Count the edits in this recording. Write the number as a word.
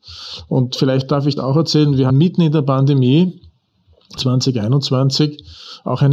three